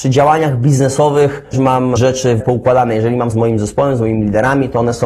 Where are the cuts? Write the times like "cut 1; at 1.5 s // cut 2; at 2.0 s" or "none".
cut 1; at 1.5 s // cut 2; at 2.0 s // cut 3; at 2.4 s // cut 4; at 3.3 s